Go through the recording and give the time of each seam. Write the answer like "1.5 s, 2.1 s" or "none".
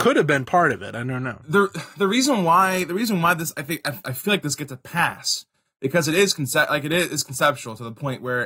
none

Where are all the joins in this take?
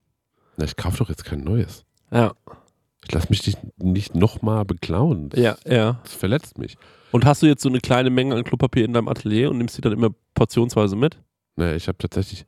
none

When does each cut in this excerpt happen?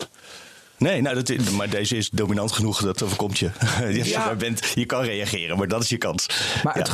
none

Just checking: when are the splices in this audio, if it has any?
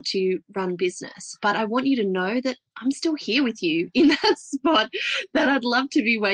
none

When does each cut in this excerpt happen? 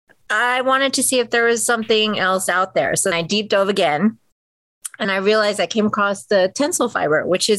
3.1 s, 5.0 s

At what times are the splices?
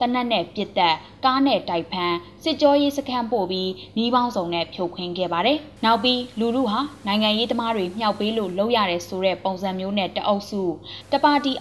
5.8 s

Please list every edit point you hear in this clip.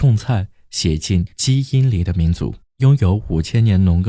1.3 s, 2.7 s

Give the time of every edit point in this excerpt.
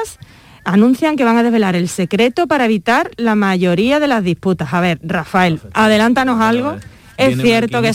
none

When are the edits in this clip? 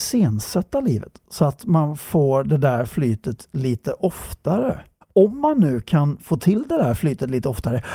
5.0 s

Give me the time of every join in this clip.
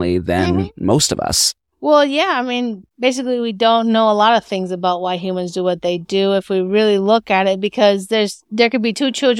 2.9 s

